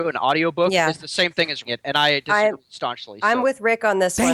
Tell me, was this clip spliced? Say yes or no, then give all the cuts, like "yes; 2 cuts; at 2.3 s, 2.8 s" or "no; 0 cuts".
yes; 1 cut; at 1.6 s